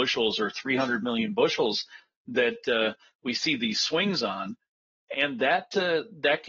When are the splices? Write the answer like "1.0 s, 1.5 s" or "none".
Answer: none